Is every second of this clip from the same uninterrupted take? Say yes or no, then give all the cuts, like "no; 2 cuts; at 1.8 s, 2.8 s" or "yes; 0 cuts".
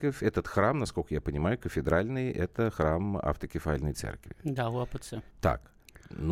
no; 1 cut; at 5.3 s